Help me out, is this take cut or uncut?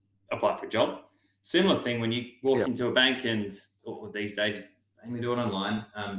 uncut